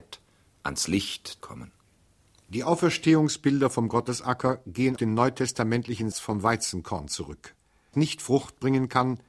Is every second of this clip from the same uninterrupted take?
no; 4 cuts; at 1.4 s, 5.0 s, 6.1 s, 7.9 s

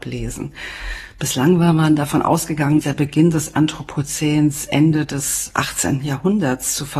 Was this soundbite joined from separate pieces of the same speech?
yes; 1 cut; at 2.8 s

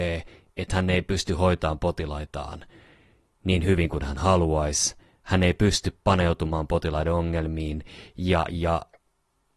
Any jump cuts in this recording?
no; 0 cuts

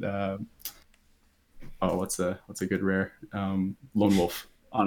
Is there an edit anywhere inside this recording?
no; 0 cuts

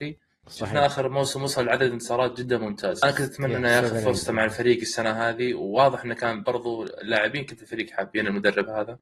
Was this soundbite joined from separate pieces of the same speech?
no; 0 cuts

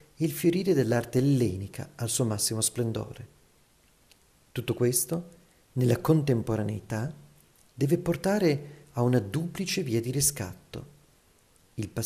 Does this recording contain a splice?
no; 0 cuts

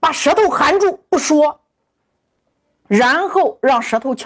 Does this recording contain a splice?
no; 0 cuts

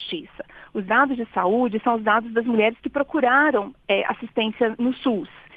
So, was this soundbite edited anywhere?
no; 0 cuts

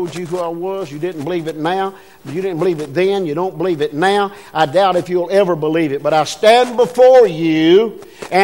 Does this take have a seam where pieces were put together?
no; 0 cuts

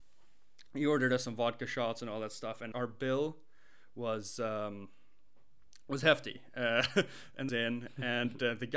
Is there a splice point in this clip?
yes; 2 cuts; at 2.7 s, 7.5 s

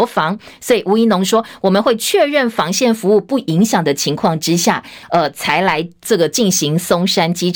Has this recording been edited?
yes; 1 cut; at 5.0 s

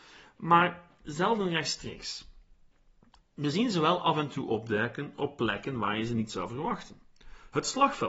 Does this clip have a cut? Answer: no; 0 cuts

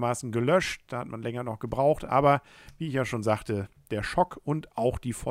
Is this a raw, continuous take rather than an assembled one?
yes; 0 cuts

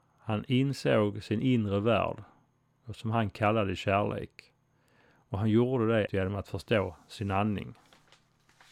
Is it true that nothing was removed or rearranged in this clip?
no; 1 cut; at 6.1 s

